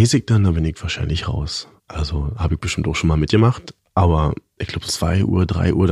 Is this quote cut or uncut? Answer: cut